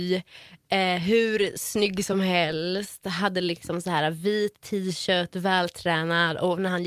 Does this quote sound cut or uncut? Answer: uncut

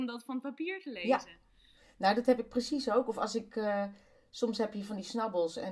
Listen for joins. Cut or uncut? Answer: uncut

